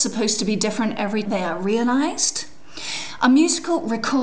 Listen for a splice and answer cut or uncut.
cut